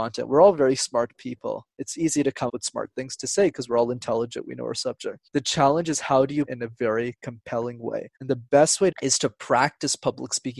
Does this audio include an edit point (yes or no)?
yes